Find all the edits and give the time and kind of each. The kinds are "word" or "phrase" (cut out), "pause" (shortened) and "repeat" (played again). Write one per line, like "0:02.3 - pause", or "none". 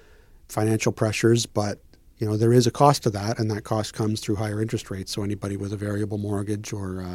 none